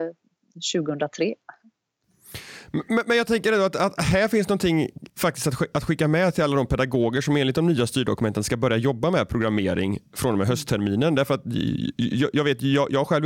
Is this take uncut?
no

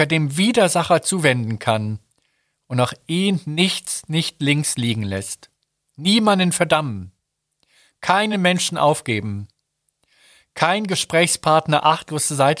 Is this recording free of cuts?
yes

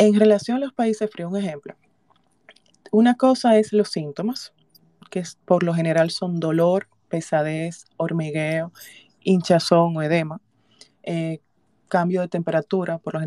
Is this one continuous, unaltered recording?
yes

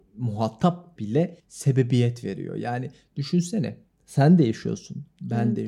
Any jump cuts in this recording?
yes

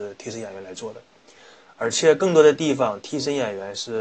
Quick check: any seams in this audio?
no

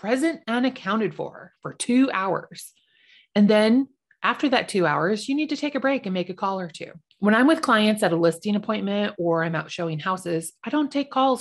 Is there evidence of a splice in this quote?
no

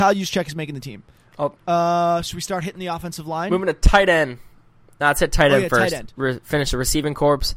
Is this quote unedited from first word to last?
no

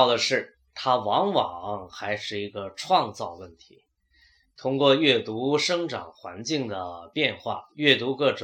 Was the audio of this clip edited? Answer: no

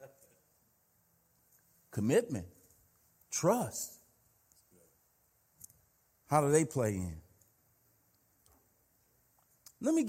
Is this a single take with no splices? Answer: yes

